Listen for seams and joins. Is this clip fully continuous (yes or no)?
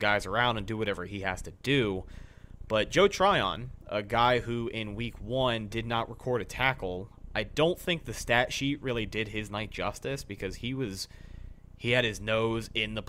yes